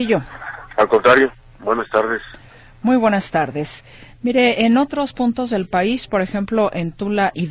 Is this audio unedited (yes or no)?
yes